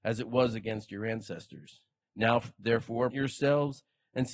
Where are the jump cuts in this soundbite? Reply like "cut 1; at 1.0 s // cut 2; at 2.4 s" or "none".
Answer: cut 1; at 2.0 s // cut 2; at 3.1 s